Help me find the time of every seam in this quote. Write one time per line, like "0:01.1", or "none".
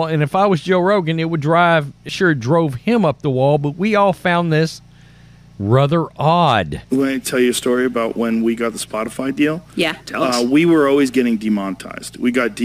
0:02.1
0:06.8